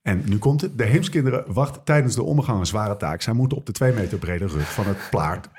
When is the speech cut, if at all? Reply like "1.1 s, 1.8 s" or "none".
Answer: none